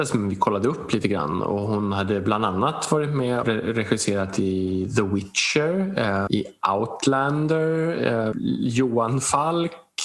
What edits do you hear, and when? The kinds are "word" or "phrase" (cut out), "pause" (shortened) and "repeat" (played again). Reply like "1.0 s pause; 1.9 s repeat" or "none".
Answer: 3.4 s word; 6.3 s word; 8.3 s word